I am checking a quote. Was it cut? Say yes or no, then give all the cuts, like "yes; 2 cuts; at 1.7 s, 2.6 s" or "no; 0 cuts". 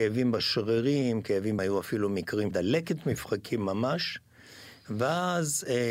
yes; 2 cuts; at 1.6 s, 2.5 s